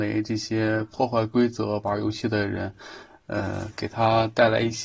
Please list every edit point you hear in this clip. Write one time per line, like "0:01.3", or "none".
none